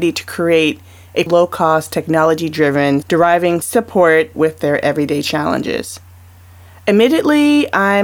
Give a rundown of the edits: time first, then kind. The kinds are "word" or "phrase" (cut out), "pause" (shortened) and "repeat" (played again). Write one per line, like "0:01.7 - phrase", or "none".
0:01.3 - word
0:03.0 - word
0:03.6 - phrase
0:04.3 - phrase